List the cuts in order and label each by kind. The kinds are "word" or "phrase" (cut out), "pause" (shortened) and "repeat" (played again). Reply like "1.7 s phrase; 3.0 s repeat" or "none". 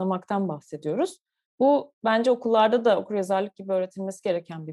none